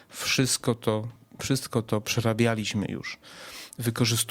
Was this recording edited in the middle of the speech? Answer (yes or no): no